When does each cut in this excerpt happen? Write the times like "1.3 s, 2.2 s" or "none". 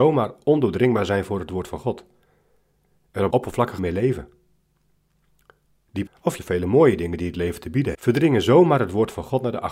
3.3 s, 3.8 s, 6.1 s, 6.4 s, 7.9 s